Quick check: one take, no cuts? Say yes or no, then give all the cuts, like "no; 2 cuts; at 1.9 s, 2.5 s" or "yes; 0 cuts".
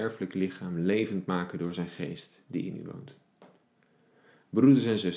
yes; 0 cuts